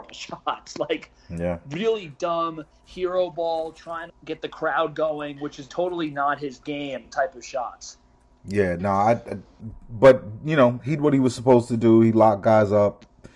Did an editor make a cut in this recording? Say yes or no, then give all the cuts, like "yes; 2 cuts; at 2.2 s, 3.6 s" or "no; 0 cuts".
yes; 4 cuts; at 4.1 s, 5.7 s, 8.1 s, 11.0 s